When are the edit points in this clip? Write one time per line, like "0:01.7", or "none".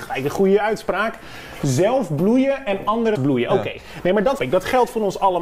0:03.2
0:04.4